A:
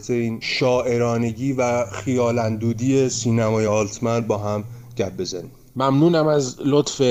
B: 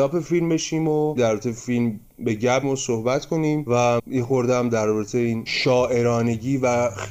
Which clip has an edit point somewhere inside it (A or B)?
B